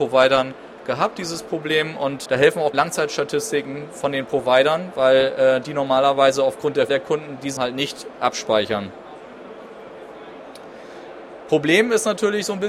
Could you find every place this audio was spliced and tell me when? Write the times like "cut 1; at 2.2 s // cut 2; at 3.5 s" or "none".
cut 1; at 2.3 s // cut 2; at 2.7 s // cut 3; at 6.9 s // cut 4; at 7.6 s